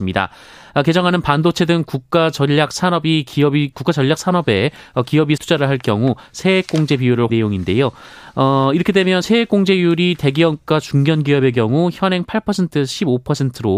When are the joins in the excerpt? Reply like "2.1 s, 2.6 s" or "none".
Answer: 3.7 s, 5.4 s, 7.3 s

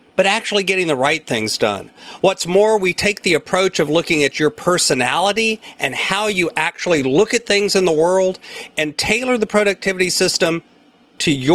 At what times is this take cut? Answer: none

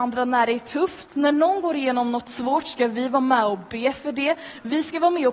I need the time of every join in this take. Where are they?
none

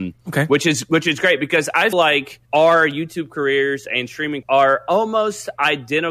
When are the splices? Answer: 1.9 s, 2.4 s, 4.4 s

